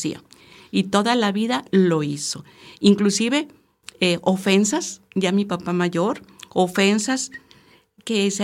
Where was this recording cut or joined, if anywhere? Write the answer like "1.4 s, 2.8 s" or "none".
none